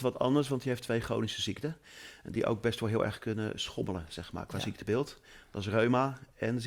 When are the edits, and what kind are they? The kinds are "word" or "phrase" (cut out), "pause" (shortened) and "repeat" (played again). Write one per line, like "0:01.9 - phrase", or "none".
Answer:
none